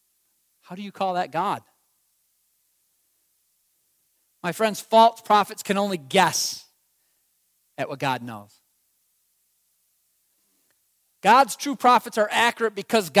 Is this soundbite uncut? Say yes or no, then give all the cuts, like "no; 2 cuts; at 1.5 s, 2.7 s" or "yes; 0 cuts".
yes; 0 cuts